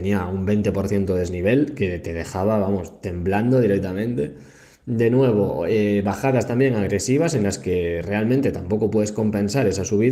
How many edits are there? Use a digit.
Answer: 0